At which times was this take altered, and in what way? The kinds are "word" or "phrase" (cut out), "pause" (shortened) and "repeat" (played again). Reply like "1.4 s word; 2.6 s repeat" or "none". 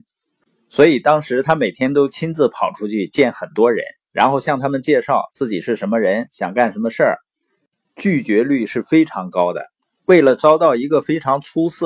9.8 s pause